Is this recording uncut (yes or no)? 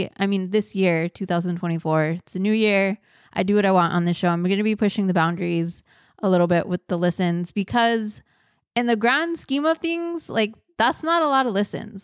yes